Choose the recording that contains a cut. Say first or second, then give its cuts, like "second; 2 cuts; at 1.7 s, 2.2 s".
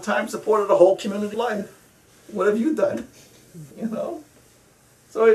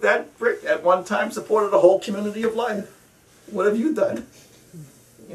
first; 2 cuts; at 1.3 s, 3.7 s